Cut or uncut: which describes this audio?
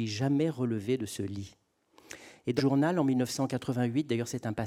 cut